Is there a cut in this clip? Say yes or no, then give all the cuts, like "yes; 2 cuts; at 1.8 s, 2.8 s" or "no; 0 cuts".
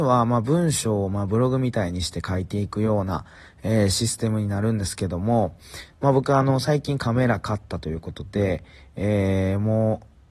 no; 0 cuts